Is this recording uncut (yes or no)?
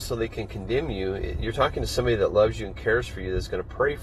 yes